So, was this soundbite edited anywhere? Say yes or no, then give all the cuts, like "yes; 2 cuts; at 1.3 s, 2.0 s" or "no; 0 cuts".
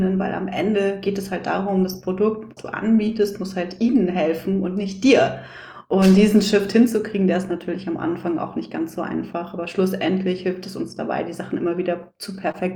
yes; 1 cut; at 2.6 s